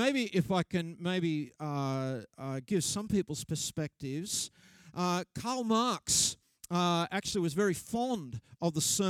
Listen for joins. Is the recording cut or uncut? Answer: uncut